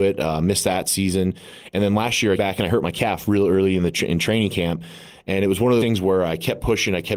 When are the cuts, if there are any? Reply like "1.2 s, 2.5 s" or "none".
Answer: 2.4 s, 5.8 s

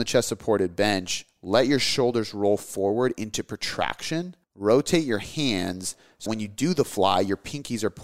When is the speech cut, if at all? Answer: 4.4 s, 6.3 s

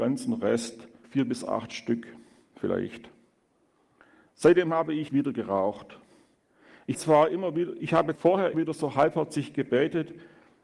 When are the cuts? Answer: 1.0 s, 5.1 s, 6.9 s, 8.2 s, 8.5 s

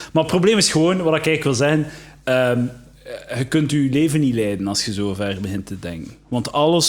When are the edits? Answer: none

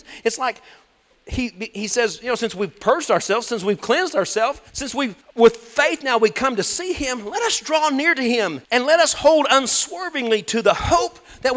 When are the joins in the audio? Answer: 4.7 s, 5.2 s, 8.6 s

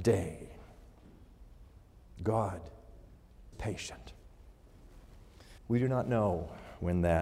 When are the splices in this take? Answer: 3.5 s, 5.6 s

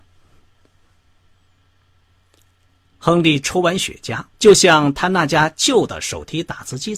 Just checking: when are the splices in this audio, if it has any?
4.3 s

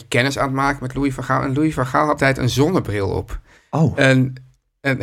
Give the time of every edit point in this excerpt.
2.2 s, 3.6 s

